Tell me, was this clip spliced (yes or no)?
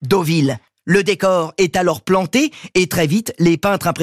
no